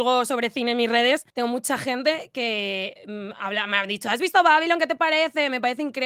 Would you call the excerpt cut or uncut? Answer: cut